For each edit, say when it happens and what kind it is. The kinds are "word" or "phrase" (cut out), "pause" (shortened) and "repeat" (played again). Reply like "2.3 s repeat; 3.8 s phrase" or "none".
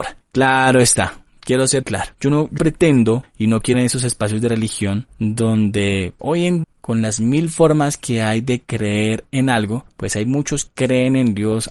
1.8 s word; 2.6 s word; 3.7 s word; 6.2 s word; 6.6 s word; 10.7 s word